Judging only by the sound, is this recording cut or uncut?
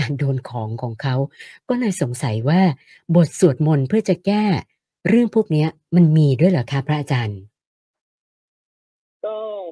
uncut